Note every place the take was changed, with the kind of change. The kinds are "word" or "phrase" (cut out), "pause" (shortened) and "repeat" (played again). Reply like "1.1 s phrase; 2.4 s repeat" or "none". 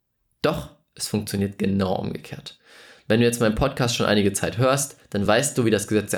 none